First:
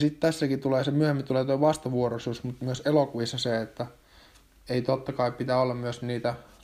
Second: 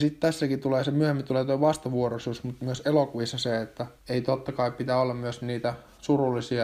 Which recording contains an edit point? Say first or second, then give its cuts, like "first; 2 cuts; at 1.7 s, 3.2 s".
second; 1 cut; at 4.0 s